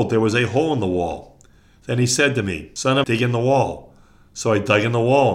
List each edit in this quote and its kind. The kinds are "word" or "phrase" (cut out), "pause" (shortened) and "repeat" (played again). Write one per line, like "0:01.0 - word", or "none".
0:03.0 - word